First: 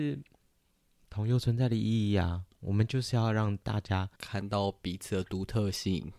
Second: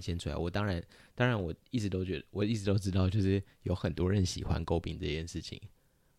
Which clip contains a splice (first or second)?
first